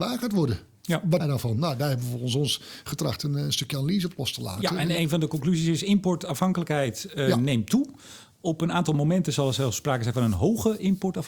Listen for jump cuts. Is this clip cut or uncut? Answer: cut